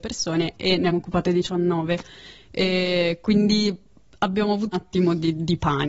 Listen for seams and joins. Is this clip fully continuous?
no; 2 cuts; at 0.9 s, 4.7 s

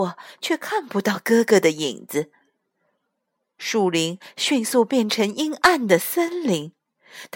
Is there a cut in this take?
no; 0 cuts

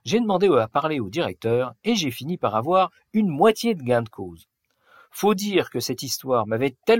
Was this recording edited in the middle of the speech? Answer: no; 0 cuts

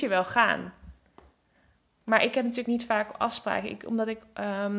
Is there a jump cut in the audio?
no; 0 cuts

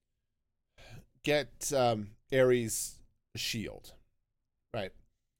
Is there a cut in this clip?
no; 0 cuts

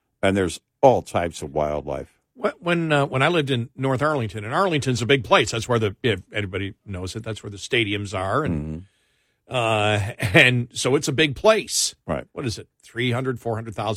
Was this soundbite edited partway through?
no; 0 cuts

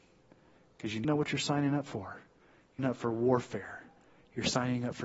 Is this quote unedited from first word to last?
no; 2 cuts; at 1.0 s, 2.8 s

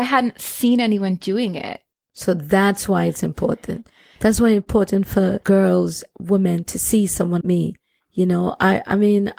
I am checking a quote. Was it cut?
yes; 3 cuts; at 1.9 s, 6.1 s, 7.4 s

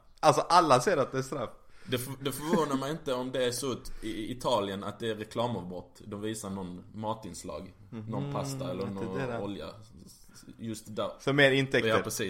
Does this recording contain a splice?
no; 0 cuts

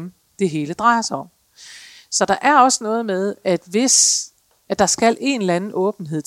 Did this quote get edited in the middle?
no; 0 cuts

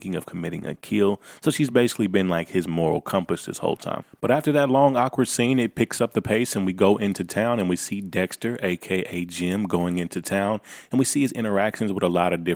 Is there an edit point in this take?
no; 0 cuts

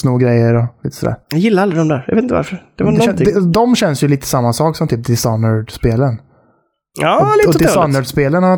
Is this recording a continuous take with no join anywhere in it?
no; 1 cut; at 1.2 s

